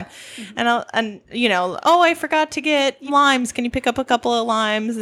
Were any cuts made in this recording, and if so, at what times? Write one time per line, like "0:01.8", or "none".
0:01.8
0:03.1